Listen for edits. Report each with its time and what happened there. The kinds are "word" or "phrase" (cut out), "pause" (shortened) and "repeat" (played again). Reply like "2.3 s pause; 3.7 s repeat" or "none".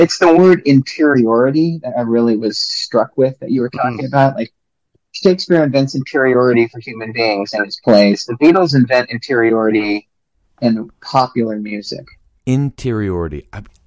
none